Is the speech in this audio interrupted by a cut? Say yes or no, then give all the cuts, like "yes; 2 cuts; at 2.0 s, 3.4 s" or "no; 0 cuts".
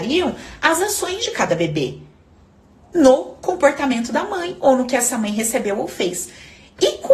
no; 0 cuts